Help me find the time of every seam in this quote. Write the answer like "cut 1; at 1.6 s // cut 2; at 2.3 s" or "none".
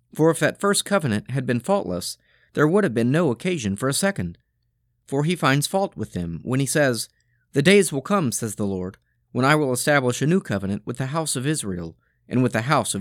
none